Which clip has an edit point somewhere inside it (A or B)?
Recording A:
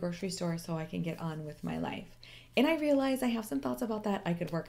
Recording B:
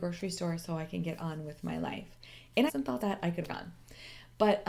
B